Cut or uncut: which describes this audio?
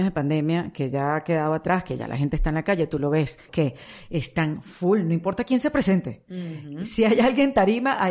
cut